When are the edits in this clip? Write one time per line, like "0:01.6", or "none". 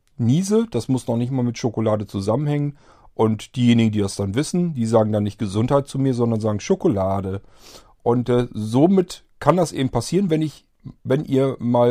none